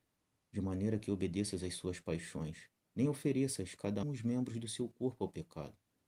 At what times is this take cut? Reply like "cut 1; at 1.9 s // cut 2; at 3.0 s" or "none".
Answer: cut 1; at 2.8 s // cut 2; at 4.0 s